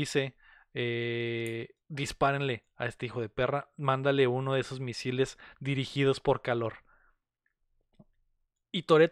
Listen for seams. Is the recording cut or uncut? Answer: cut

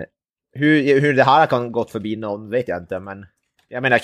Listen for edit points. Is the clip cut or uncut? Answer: uncut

